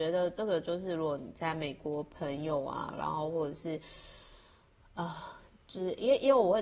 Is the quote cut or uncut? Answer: uncut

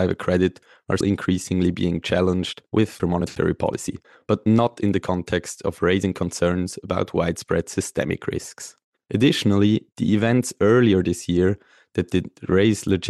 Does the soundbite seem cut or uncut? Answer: cut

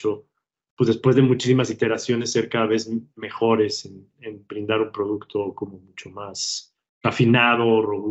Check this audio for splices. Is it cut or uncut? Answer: cut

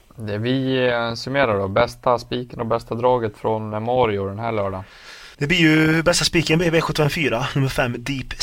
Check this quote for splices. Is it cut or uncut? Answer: cut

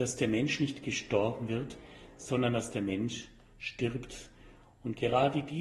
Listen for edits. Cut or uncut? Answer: uncut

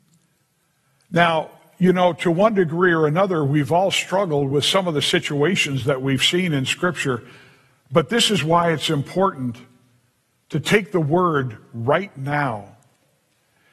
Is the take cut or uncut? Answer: uncut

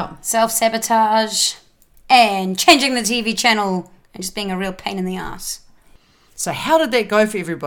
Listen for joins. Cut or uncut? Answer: uncut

